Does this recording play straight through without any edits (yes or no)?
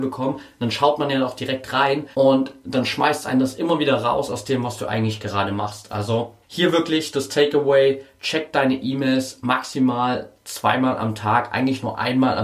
no